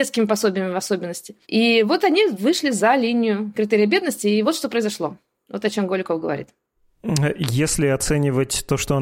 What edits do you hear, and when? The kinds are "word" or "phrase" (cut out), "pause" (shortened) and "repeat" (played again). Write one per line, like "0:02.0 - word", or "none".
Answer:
0:01.4 - pause

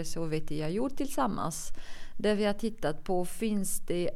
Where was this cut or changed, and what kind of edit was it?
none

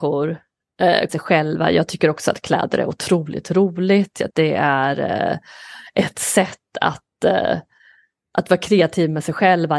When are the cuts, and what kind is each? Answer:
0:01.1 - phrase
0:04.3 - phrase

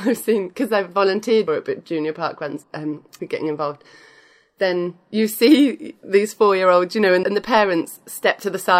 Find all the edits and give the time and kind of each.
0:01.5 - word
0:02.6 - word
0:03.2 - word
0:07.2 - word

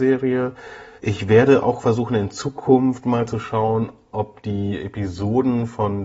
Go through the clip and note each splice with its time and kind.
0:01.0 - pause

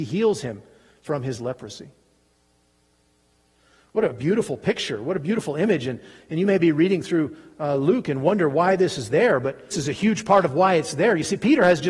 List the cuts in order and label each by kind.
0:04.1 - word
0:09.7 - word

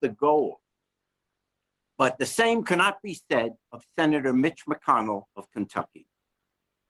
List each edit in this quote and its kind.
0:03.6 - pause
0:05.3 - pause

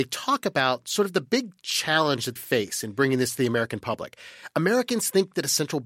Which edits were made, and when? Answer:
0:02.4 - word

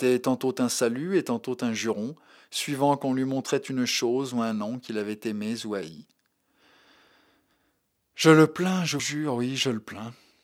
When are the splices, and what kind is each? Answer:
0:09.0 - word

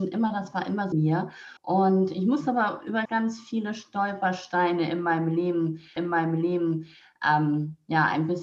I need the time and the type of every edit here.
0:00.9 - word
0:01.6 - pause
0:03.1 - word
0:06.0 - repeat

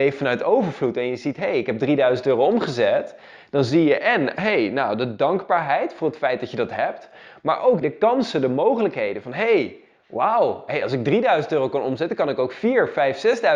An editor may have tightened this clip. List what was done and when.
0:07.8 - word

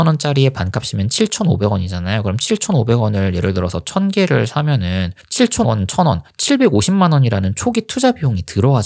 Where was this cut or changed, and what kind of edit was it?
0:05.6 - word

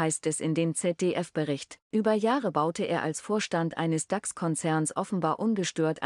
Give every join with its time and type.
0:01.8 - pause

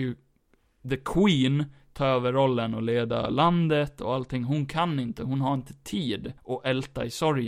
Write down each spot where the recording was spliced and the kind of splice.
0:06.4 - pause

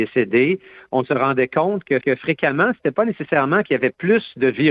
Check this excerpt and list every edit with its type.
0:02.0 - repeat

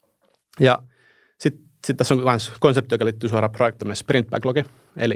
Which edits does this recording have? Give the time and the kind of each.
0:03.8 - word

